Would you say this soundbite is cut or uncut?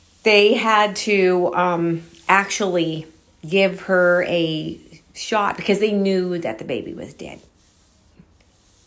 uncut